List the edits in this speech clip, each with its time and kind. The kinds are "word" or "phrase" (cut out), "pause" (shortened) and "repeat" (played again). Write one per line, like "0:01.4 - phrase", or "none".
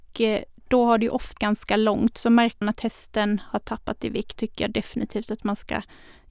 0:01.4 - word
0:02.6 - word
0:04.4 - word